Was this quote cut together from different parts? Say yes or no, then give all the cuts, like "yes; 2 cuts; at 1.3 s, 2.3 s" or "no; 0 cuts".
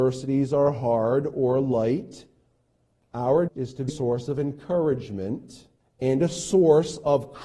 yes; 2 cuts; at 3.5 s, 3.9 s